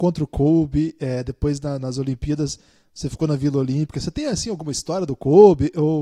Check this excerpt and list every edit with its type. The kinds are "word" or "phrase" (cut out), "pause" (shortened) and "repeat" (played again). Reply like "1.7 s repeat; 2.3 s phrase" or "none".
none